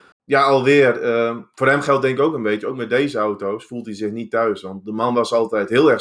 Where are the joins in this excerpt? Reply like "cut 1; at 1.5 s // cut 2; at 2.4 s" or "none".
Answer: none